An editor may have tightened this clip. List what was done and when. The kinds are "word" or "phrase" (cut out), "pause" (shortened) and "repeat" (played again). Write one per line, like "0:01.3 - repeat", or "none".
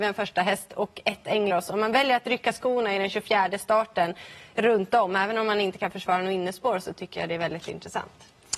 0:01.5 - word

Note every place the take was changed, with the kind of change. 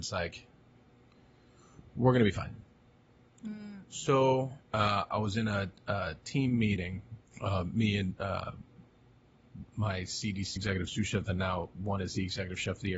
0:04.6 - pause
0:07.3 - pause
0:09.6 - word
0:10.6 - word

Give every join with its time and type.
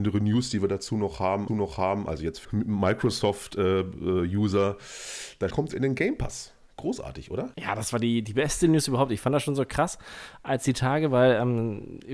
0:01.5 - repeat
0:02.4 - phrase
0:05.5 - word
0:07.5 - pause

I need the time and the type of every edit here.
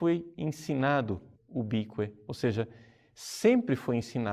0:01.3 - word
0:02.3 - phrase

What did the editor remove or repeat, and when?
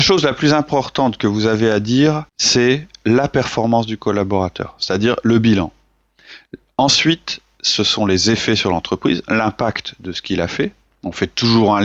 0:02.3 - pause

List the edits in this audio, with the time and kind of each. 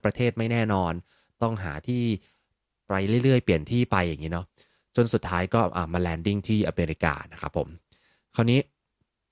none

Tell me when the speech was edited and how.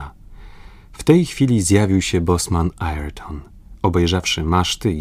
none

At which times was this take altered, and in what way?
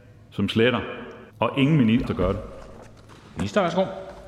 0:01.3 - pause
0:02.1 - phrase

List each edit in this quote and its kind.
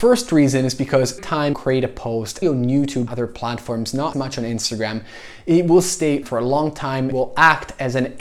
0:01.2 - word
0:01.5 - word
0:02.4 - word
0:03.1 - word
0:04.1 - word
0:06.2 - word
0:07.1 - word

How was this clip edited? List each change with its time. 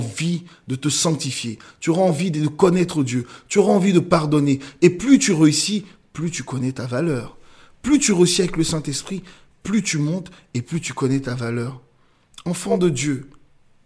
none

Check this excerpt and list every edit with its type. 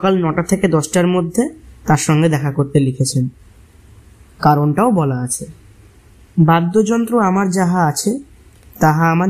none

